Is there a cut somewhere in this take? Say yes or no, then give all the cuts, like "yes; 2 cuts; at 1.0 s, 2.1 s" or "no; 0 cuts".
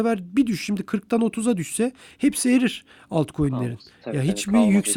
no; 0 cuts